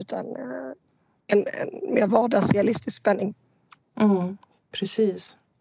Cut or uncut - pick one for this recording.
uncut